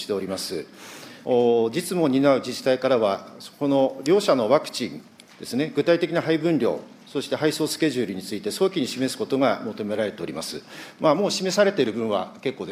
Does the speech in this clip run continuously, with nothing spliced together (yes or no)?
yes